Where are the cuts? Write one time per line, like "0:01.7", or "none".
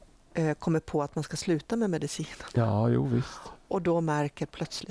none